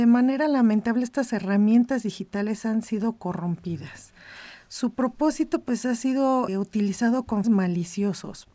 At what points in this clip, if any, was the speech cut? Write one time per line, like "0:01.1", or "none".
0:06.5
0:07.4